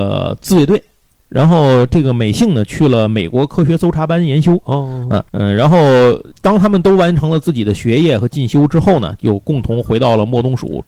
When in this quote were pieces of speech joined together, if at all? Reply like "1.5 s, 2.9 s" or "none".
5.3 s, 6.3 s